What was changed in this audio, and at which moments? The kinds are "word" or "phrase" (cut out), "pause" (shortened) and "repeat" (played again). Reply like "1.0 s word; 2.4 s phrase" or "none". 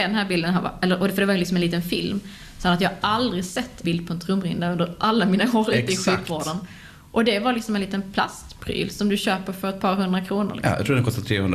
3.8 s phrase

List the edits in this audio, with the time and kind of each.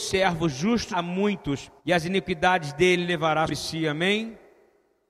0.9 s word; 1.8 s pause; 3.5 s word

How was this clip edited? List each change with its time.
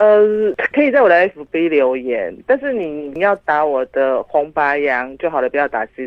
none

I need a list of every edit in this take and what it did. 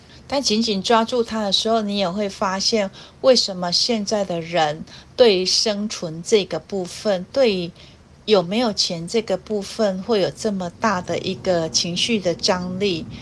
none

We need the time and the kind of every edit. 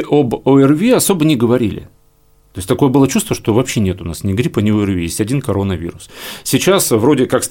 none

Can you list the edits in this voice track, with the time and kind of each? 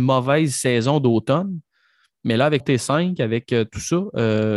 2.6 s word

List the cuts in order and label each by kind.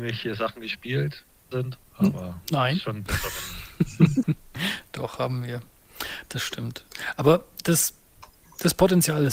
1.5 s phrase; 1.9 s pause; 4.2 s word

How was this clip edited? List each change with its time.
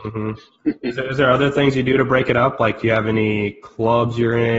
none

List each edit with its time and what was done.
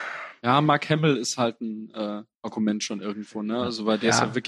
2.3 s pause

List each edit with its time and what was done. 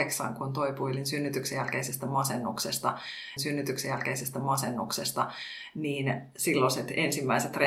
3.4 s repeat

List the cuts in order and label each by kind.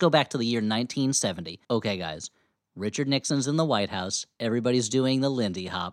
1.6 s pause

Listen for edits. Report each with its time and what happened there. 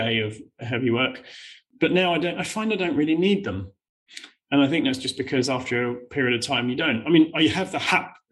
none

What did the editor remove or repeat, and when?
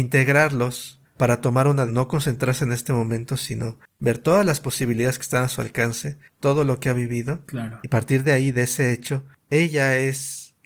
1.9 s word

